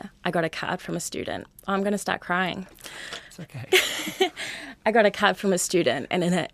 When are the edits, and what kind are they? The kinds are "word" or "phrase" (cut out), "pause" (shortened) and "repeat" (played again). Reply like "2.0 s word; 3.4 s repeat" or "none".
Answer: none